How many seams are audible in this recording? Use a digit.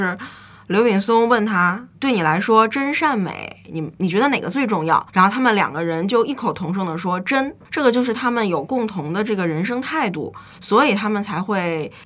3